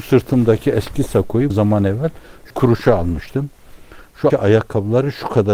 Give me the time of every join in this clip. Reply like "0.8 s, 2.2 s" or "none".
1.5 s, 2.5 s, 4.3 s